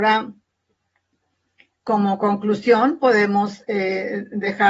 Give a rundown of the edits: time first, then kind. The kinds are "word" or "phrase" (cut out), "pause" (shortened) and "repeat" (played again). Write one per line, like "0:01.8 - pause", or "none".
none